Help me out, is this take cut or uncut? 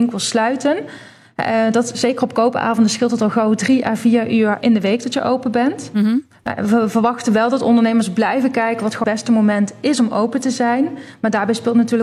cut